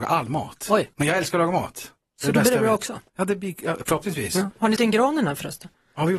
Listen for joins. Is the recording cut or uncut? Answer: cut